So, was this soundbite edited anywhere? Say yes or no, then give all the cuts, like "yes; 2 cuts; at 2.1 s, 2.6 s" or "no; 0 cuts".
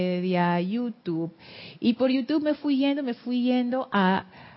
no; 0 cuts